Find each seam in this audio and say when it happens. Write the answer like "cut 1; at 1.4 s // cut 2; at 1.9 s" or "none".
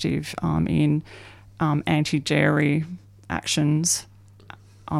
none